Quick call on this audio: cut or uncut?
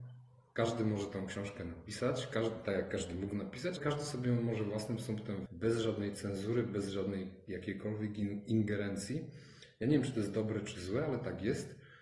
cut